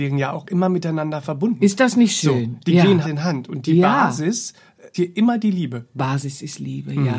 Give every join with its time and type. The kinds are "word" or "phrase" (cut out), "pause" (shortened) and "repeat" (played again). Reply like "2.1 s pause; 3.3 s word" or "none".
3.0 s word; 4.9 s word